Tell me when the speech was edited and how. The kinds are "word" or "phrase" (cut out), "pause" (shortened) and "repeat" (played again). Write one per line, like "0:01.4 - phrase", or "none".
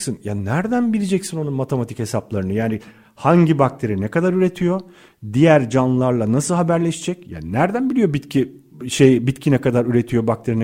none